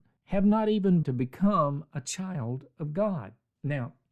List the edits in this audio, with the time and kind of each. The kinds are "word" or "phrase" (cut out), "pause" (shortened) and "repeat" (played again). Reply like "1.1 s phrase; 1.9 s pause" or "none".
1.0 s word